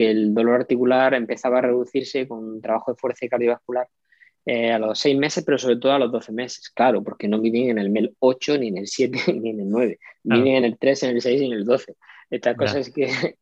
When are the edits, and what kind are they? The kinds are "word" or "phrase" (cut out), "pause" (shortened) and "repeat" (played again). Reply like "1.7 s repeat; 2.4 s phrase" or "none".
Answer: none